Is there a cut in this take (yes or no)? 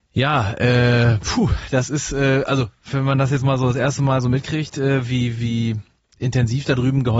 no